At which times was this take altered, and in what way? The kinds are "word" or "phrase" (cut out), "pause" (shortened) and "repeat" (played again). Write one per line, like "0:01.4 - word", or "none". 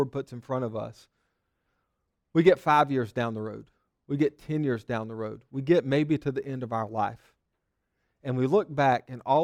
none